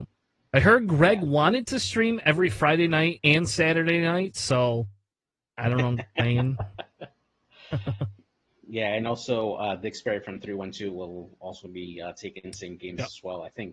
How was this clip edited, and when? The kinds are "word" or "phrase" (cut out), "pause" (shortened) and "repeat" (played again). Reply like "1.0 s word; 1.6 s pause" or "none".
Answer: none